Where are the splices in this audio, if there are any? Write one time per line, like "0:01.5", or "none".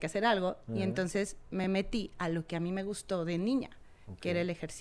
none